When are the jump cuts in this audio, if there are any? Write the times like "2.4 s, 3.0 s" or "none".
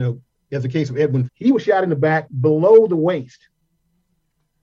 1.3 s